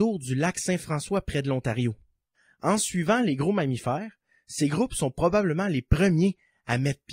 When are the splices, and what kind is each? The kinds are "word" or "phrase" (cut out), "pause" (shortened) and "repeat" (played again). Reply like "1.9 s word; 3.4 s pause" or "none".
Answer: none